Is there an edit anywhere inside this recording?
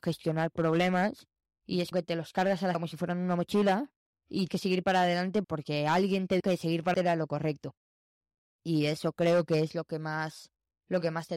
yes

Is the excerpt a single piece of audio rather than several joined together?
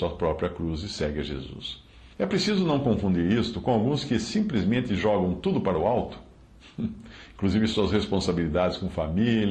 no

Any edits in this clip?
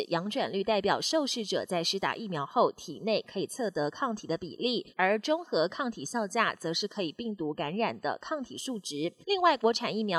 yes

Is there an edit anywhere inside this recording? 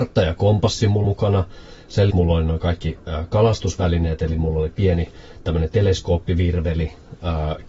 yes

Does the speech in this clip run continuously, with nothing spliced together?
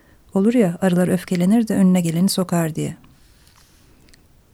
yes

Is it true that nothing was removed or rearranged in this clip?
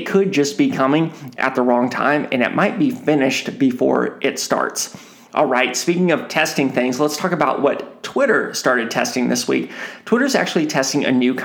yes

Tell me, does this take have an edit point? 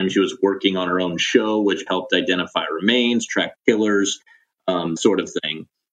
yes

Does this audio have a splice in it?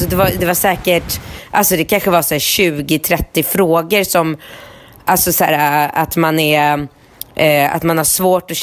no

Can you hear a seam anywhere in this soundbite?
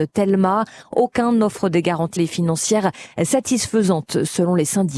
yes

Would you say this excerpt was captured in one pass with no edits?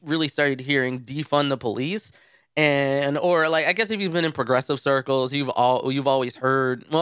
yes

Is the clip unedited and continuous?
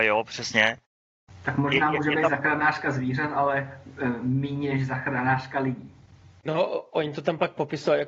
yes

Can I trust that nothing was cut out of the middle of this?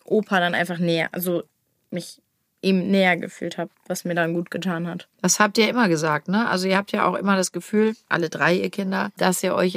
no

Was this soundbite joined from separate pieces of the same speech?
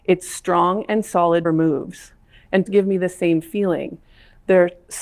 yes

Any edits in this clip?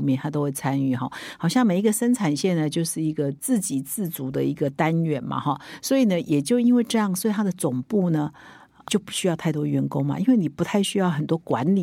yes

